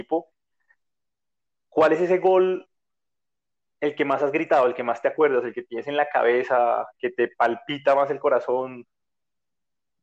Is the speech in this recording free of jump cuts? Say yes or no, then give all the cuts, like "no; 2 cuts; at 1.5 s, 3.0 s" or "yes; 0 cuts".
yes; 0 cuts